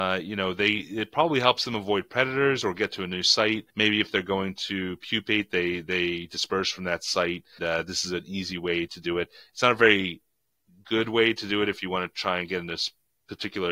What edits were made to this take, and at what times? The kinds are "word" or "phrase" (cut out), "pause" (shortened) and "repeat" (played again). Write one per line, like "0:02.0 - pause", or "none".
0:03.7 - pause
0:07.6 - word